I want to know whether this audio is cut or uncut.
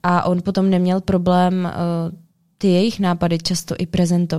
uncut